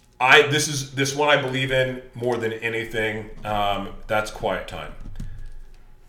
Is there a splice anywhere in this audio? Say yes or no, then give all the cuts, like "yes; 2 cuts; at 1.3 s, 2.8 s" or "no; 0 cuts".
no; 0 cuts